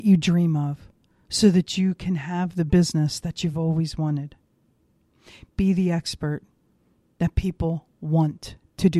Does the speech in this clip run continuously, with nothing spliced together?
yes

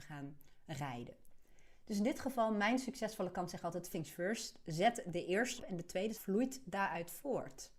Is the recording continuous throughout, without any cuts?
no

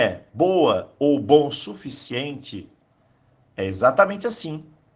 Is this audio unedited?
yes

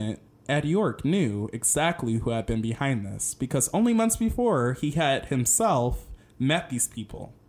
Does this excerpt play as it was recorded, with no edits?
yes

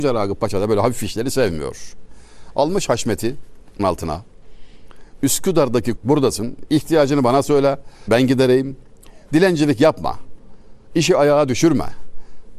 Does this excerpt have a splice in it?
yes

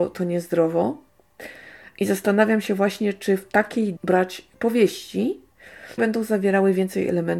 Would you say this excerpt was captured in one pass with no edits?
no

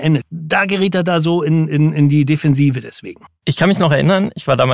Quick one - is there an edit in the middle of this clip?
yes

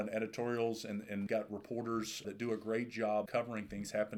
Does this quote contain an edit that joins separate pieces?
yes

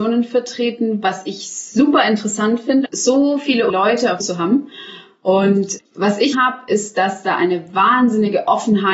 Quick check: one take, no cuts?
no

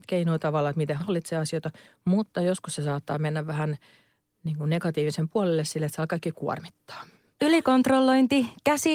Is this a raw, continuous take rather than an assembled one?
yes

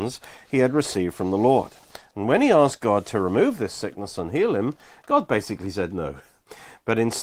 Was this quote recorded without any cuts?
yes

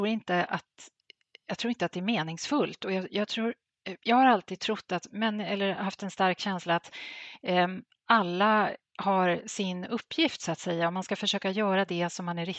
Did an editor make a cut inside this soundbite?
no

